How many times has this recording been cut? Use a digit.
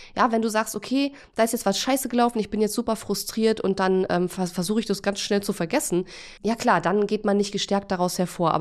1